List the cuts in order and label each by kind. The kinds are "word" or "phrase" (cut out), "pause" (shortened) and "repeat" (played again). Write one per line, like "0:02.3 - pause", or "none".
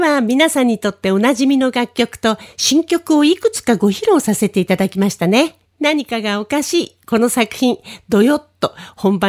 0:05.6 - pause